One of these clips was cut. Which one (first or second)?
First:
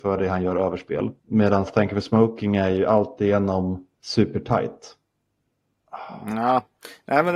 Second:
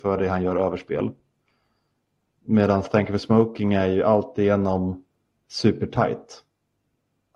first